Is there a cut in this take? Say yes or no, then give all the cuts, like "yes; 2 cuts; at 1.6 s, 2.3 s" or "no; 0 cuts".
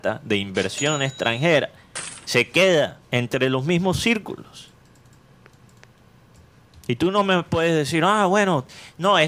yes; 1 cut; at 3.0 s